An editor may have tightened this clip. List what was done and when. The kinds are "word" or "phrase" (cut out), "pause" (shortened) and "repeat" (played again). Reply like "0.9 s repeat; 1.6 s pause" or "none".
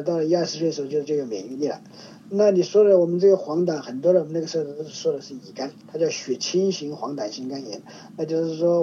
5.8 s word